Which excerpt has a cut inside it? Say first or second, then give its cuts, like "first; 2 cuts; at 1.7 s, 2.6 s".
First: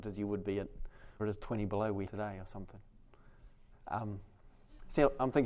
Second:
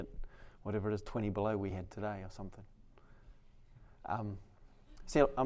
first; 3 cuts; at 1.2 s, 2.1 s, 3.7 s